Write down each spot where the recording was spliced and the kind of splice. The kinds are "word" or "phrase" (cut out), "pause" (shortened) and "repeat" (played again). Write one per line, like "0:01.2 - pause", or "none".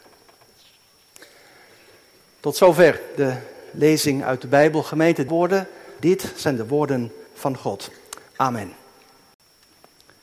0:05.3 - phrase
0:06.0 - word
0:07.3 - pause
0:08.3 - pause